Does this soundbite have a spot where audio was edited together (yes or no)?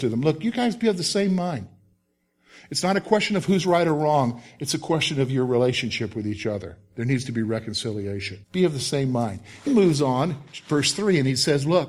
yes